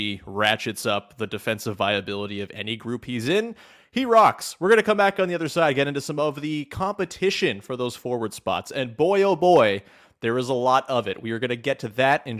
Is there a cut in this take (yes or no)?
no